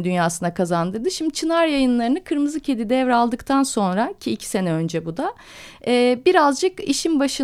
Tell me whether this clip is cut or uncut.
uncut